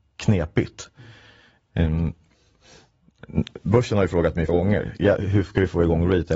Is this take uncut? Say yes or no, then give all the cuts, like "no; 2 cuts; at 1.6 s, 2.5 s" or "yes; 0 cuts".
no; 1 cut; at 4.5 s